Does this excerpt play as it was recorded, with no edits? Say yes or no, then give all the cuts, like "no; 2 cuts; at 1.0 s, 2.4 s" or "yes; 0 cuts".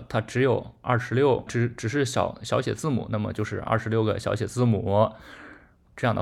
no; 1 cut; at 1.5 s